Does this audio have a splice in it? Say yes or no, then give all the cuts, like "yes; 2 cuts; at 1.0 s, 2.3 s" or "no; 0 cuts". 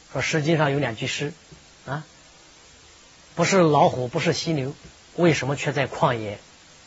no; 0 cuts